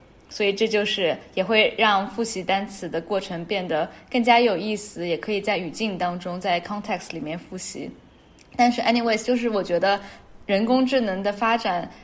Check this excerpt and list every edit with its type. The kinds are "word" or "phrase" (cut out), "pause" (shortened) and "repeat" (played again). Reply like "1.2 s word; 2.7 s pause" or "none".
none

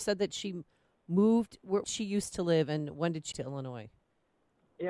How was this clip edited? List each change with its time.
1.8 s phrase; 3.3 s word

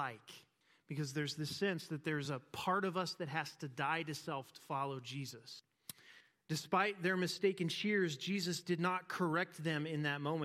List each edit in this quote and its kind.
none

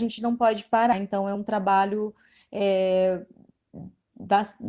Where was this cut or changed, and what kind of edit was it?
none

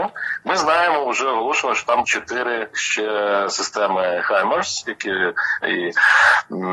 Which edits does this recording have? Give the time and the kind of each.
2.0 s word; 2.7 s word; 5.6 s word

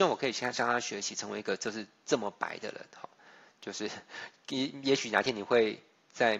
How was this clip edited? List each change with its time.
none

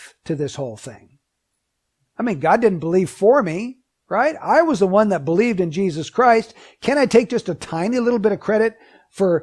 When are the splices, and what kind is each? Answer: none

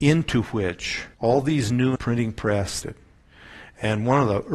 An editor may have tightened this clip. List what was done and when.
1.1 s pause; 2.0 s word; 2.8 s phrase

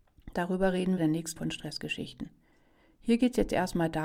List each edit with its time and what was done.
1.0 s phrase; 1.4 s word

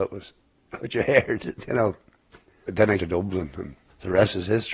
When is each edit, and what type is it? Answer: 2.7 s phrase; 3.0 s word

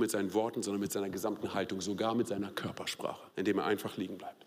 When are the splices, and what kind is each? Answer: 3.3 s pause

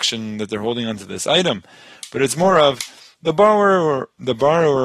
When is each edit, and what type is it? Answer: none

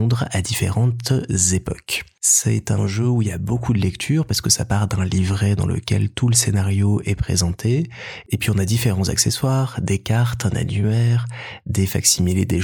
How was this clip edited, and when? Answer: none

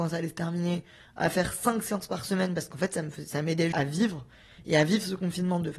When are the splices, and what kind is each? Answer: 3.7 s word

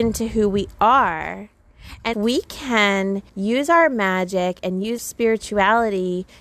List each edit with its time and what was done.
2.1 s word; 3.3 s pause; 5.0 s word

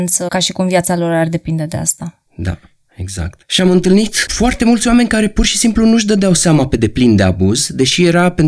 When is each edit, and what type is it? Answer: 2.3 s pause; 3.4 s pause

